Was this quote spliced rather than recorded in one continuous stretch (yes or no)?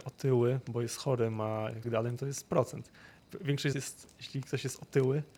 yes